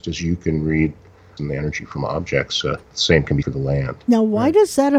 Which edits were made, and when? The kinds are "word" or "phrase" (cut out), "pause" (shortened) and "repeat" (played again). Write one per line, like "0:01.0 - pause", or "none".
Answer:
0:01.4 - word
0:02.8 - pause
0:03.4 - word